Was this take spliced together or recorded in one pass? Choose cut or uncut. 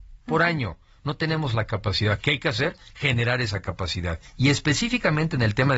cut